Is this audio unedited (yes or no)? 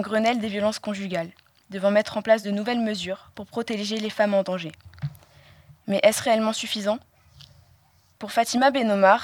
yes